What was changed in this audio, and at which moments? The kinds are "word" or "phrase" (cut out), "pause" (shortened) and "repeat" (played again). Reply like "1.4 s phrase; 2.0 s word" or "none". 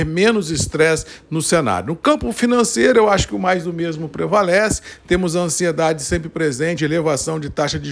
6.8 s phrase